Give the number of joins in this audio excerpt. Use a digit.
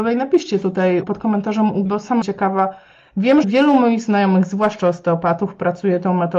4